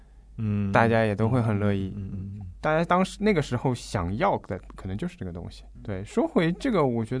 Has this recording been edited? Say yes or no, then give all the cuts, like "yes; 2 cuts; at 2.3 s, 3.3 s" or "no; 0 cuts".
yes; 1 cut; at 5.8 s